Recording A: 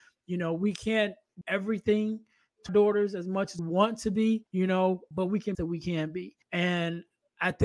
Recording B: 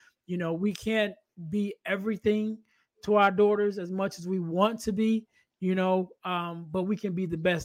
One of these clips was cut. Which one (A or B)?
A